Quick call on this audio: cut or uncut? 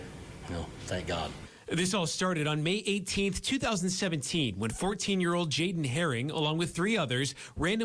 uncut